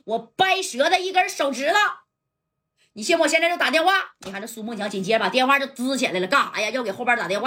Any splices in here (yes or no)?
no